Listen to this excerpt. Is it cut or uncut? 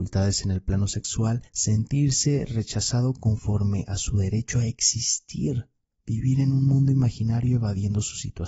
cut